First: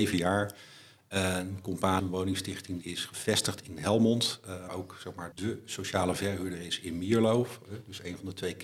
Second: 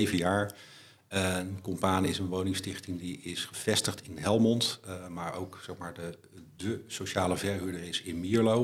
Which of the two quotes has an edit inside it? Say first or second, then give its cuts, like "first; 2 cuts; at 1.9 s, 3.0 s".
first; 4 cuts; at 2.0 s, 2.8 s, 4.7 s, 5.3 s